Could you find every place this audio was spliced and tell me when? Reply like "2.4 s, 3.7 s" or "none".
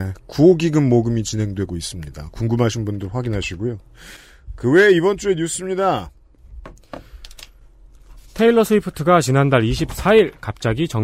none